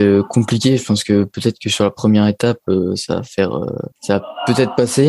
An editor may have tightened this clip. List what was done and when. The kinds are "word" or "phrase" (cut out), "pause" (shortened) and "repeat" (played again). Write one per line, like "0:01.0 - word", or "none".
0:03.9 - pause